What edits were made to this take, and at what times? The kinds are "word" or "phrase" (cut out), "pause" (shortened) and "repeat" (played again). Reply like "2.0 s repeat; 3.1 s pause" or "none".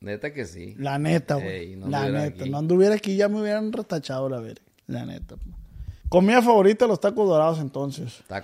4.7 s pause; 6.0 s pause